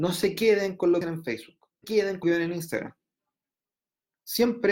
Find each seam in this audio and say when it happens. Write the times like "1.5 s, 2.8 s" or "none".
1.0 s, 1.8 s, 2.2 s